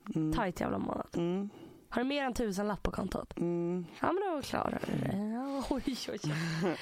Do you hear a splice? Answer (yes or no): no